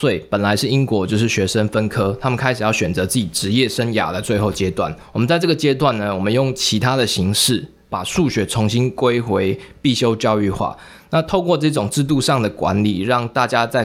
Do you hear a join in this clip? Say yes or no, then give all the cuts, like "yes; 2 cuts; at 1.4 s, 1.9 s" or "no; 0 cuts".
no; 0 cuts